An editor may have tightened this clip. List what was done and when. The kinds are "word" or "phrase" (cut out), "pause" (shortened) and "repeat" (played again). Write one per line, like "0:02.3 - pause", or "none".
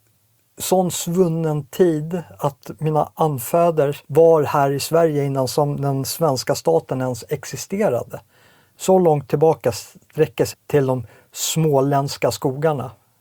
0:04.0 - pause
0:10.5 - phrase